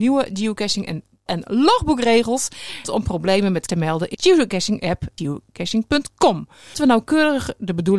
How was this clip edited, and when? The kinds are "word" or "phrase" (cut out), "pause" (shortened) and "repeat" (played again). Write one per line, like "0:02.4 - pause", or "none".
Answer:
0:01.3 - word
0:02.8 - word
0:03.7 - word
0:04.1 - word
0:05.2 - word
0:06.7 - word